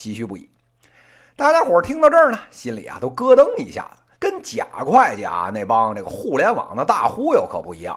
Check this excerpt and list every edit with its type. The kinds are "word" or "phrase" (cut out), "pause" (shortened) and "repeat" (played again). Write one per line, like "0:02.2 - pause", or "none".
0:04.1 - pause